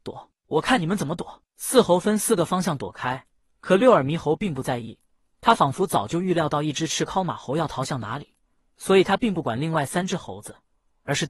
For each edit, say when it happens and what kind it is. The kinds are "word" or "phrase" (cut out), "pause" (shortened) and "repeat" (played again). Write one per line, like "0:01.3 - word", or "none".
none

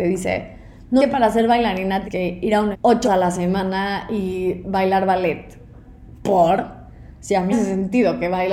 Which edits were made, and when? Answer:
0:01.0 - word
0:02.0 - word
0:02.7 - word
0:03.0 - word
0:07.5 - word

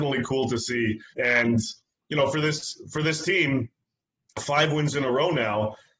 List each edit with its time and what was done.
0:01.1 - word

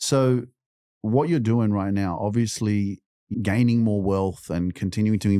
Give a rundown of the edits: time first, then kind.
0:03.3 - word

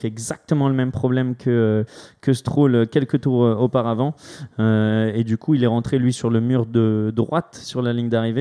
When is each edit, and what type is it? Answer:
0:06.1 - word

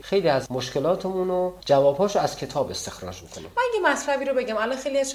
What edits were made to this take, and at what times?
none

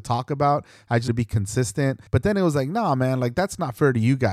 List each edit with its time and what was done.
0:01.1 - word
0:02.1 - pause

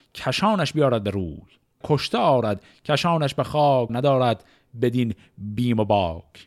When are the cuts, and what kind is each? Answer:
0:01.8 - word
0:03.9 - word

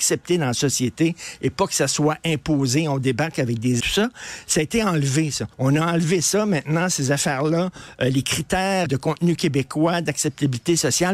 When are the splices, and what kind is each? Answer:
0:03.8 - word
0:05.5 - pause
0:08.9 - word

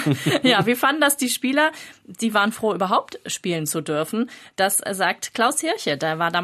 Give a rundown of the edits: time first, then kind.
none

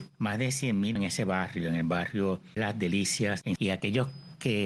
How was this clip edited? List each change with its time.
0:01.0 - word
0:02.6 - word
0:03.6 - word

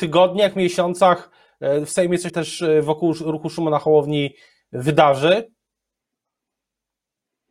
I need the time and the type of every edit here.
0:02.3 - word

